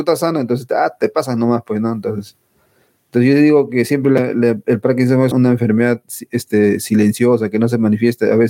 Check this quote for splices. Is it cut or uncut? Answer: cut